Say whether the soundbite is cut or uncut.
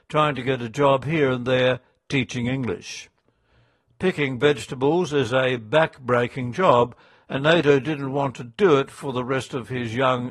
uncut